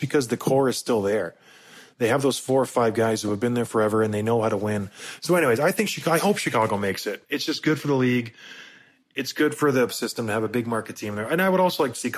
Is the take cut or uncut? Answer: cut